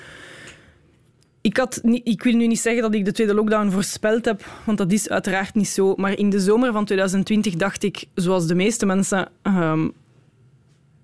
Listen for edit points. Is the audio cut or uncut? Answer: uncut